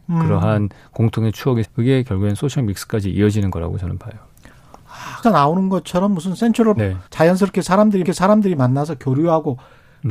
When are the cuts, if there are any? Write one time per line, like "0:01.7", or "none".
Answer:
0:01.6
0:05.2
0:06.8
0:07.1
0:08.0